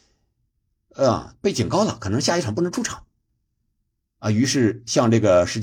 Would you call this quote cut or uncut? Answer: uncut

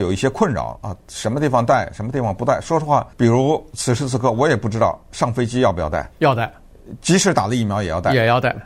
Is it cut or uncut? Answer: cut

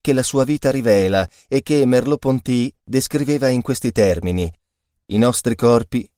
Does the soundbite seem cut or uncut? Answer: uncut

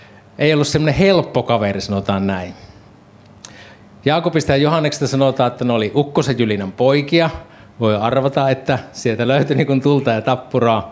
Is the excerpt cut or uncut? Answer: uncut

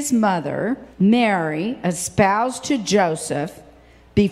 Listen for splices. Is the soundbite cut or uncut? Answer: cut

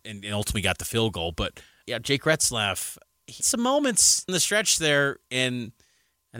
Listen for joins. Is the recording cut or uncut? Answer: cut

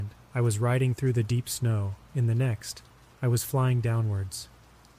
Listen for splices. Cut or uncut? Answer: uncut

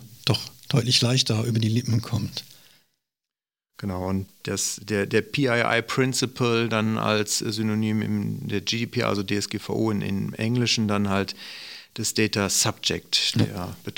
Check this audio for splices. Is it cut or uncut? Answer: uncut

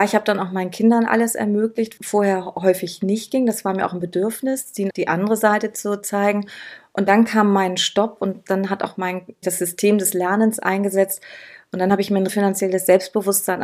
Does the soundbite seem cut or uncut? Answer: cut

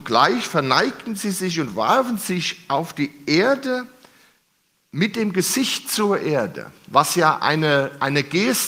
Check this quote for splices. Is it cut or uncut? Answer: uncut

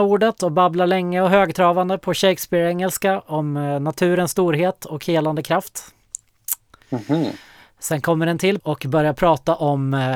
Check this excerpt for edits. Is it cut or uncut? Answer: cut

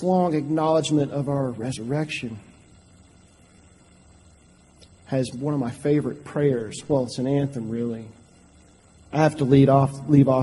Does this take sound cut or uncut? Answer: uncut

